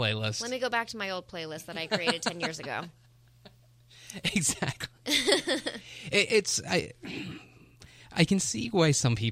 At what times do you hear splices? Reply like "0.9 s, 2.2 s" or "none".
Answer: none